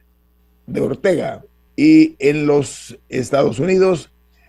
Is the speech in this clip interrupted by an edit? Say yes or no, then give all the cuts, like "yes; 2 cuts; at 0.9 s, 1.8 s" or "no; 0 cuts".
yes; 1 cut; at 1.7 s